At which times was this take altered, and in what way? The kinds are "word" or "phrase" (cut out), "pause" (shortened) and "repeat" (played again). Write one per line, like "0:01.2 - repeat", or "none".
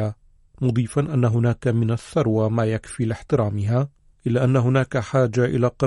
none